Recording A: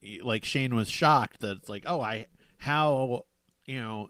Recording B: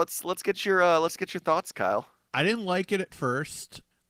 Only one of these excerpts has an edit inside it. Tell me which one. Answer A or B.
A